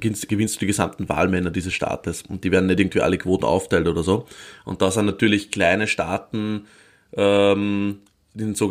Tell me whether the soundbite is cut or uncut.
uncut